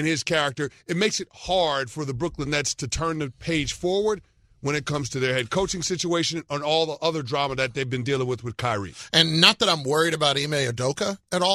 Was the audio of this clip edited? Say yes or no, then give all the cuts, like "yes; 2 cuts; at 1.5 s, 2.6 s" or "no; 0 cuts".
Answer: no; 0 cuts